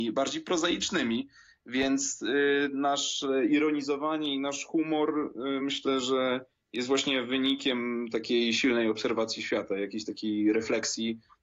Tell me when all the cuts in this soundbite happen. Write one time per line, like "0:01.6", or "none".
none